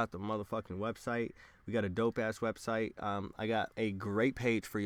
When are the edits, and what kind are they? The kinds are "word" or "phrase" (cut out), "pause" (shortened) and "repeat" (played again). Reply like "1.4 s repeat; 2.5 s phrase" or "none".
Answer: 3.7 s pause